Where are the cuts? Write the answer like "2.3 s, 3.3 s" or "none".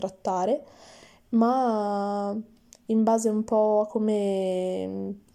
none

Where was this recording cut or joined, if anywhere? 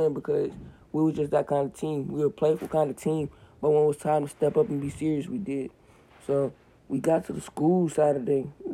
none

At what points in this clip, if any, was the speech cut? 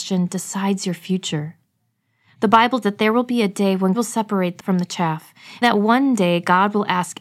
2.8 s, 3.9 s, 4.6 s, 5.6 s

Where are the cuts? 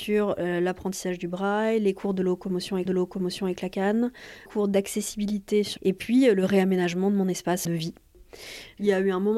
2.9 s, 4.5 s, 5.8 s, 7.6 s

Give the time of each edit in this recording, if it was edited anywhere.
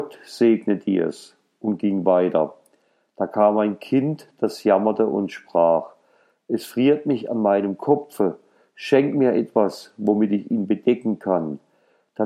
none

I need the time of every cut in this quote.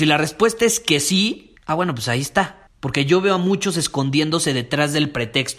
1.6 s, 2.7 s

